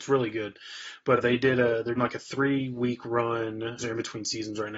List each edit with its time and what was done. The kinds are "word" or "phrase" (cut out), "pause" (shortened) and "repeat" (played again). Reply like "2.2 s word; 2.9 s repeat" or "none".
1.2 s word; 2.0 s word; 3.8 s word